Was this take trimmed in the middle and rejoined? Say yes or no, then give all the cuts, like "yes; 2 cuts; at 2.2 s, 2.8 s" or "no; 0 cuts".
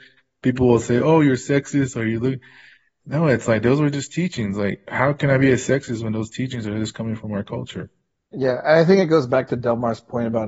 no; 0 cuts